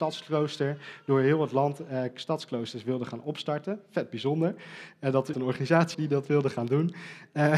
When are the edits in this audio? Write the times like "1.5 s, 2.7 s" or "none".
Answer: 5.3 s, 5.9 s

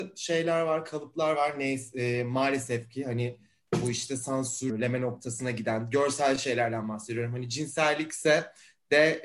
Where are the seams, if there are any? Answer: none

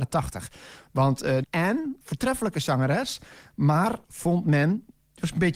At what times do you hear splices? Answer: 1.4 s, 2.0 s

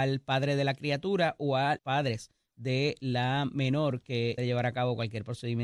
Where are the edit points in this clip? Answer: 1.8 s, 4.4 s

